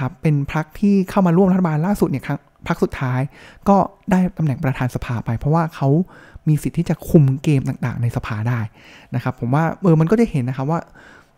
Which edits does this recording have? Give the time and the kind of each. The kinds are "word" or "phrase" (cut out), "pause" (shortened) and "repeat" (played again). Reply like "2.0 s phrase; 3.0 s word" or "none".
none